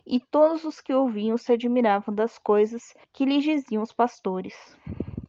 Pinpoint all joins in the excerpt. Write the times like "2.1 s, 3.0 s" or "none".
3.0 s